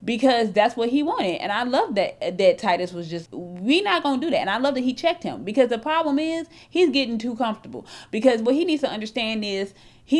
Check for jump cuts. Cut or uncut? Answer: cut